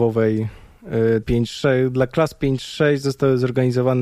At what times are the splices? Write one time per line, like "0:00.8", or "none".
0:01.2